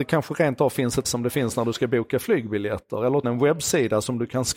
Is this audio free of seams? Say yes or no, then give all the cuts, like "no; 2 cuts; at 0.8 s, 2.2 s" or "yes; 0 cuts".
no; 2 cuts; at 1.0 s, 3.2 s